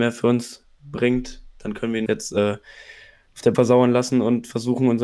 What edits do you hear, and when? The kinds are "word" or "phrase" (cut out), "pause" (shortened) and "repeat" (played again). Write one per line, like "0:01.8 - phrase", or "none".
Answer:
0:02.1 - word
0:03.5 - word